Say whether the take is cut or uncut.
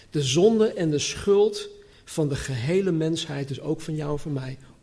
uncut